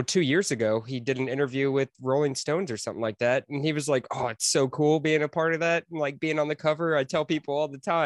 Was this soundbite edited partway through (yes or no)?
no